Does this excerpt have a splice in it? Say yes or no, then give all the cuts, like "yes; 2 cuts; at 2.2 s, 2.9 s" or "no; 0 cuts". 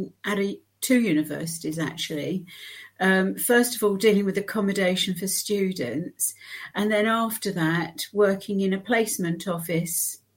no; 0 cuts